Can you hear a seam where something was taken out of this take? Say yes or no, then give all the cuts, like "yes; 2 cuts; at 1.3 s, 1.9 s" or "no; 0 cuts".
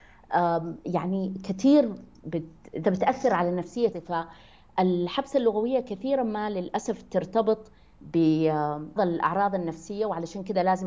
yes; 3 cuts; at 2.8 s, 3.9 s, 9.0 s